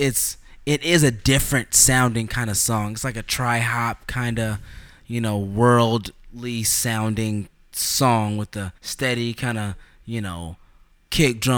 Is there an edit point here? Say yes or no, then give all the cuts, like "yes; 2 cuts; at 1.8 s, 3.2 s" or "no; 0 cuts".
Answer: yes; 1 cut; at 8.8 s